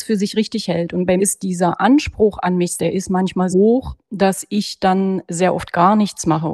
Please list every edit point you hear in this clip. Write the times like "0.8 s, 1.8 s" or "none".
1.2 s, 2.8 s, 3.5 s